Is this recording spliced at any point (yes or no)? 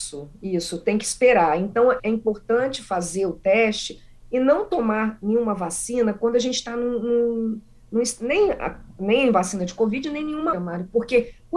yes